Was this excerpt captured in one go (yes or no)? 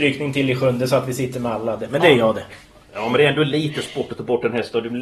yes